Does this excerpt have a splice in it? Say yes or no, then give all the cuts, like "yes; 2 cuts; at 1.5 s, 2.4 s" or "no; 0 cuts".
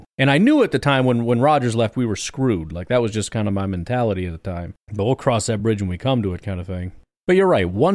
no; 0 cuts